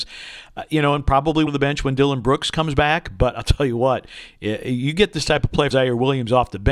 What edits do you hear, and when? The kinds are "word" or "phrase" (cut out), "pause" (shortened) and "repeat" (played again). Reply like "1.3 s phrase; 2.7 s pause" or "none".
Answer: 1.5 s phrase; 5.7 s word